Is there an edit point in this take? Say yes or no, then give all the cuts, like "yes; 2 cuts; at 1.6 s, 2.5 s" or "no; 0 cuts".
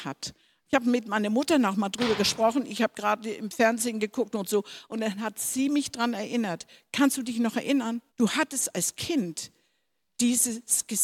yes; 1 cut; at 8.1 s